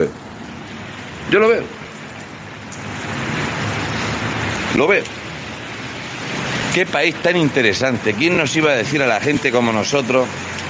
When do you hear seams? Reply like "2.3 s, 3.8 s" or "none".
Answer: none